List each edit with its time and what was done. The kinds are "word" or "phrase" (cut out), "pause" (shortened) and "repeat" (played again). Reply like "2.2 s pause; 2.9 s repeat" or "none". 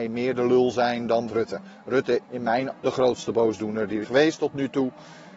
1.3 s word; 2.2 s word; 2.7 s word; 4.0 s word

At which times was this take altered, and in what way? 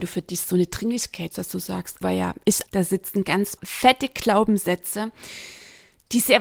1.3 s word; 2.0 s word; 2.7 s word; 3.6 s word

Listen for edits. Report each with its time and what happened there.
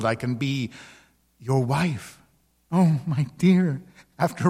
none

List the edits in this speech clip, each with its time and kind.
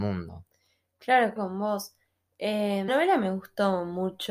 1.4 s word; 2.9 s word

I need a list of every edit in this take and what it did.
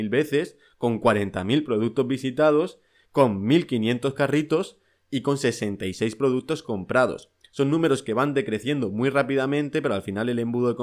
none

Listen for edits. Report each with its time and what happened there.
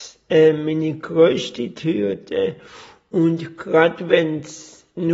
none

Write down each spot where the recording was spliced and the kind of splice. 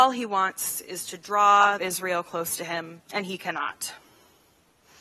1.8 s phrase; 3.0 s pause

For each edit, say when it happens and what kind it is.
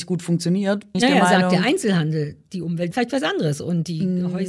0.9 s word; 2.9 s word

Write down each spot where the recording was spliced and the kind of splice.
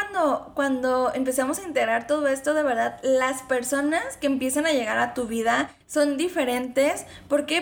5.8 s pause

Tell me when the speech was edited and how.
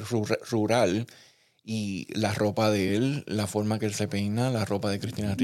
none

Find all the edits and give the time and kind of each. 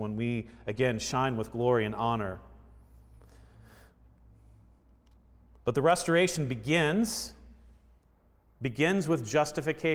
none

